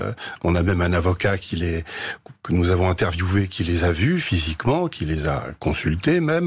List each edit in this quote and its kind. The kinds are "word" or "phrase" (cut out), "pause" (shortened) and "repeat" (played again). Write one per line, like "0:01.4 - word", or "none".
none